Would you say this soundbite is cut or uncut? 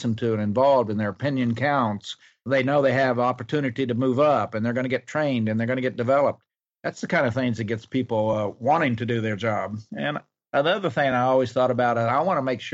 uncut